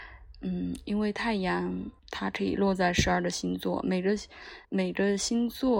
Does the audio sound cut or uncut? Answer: cut